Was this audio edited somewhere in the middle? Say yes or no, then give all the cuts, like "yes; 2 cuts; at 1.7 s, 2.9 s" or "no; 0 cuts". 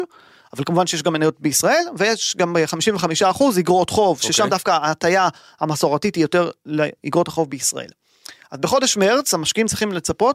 no; 0 cuts